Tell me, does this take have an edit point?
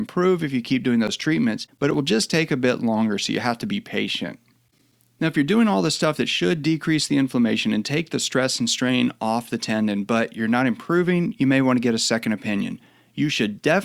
no; 0 cuts

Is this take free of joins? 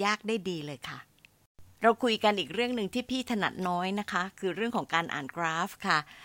no; 1 cut; at 1.7 s

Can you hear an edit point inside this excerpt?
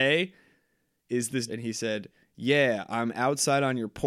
yes; 1 cut; at 1.5 s

